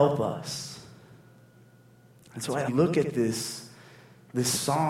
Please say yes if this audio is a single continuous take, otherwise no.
no